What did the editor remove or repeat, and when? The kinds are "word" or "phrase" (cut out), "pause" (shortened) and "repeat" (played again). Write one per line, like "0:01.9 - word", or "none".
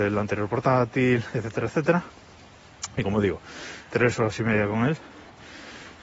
0:03.9 - word